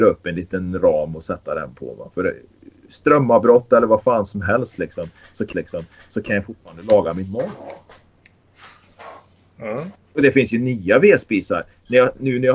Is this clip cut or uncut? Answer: cut